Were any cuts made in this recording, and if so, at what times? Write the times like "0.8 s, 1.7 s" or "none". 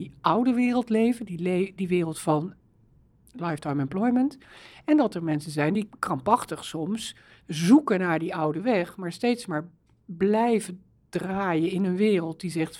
none

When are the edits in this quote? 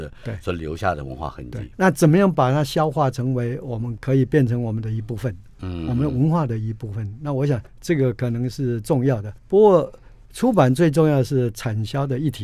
1.7 s, 7.7 s, 9.4 s

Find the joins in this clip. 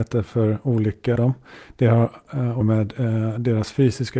1.2 s, 2.6 s

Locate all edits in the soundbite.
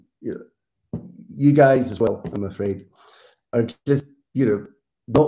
none

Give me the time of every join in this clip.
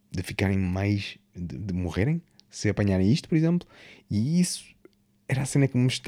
none

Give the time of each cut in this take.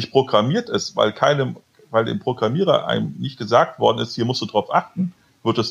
none

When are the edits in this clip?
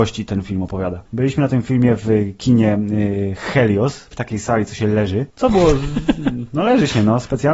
1.1 s, 4.1 s, 5.3 s

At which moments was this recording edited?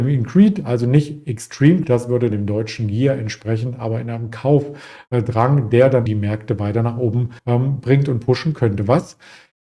1.8 s, 2.3 s, 6.1 s, 7.4 s

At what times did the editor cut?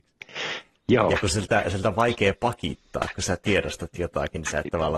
none

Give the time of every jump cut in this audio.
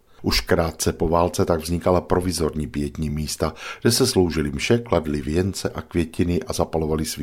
none

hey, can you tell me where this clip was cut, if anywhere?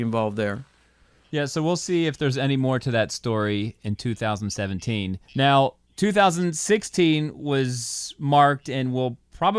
5.3 s

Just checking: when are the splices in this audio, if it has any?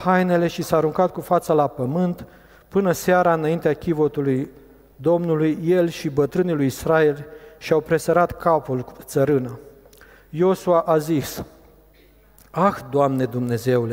none

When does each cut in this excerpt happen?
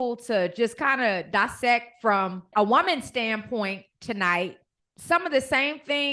none

